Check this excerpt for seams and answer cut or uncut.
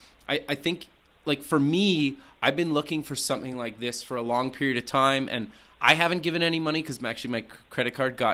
uncut